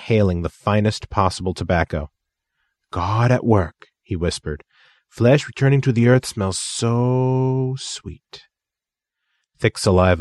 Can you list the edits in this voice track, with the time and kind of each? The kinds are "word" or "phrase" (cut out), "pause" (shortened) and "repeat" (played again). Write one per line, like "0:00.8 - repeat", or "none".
none